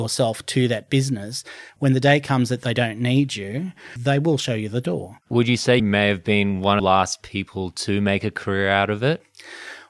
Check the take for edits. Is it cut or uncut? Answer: cut